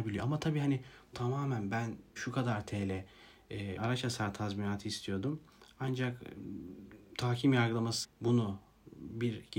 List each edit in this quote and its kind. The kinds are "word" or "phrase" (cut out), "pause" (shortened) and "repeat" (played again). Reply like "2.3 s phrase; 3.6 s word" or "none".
1.1 s word; 2.2 s word; 3.8 s word; 8.0 s word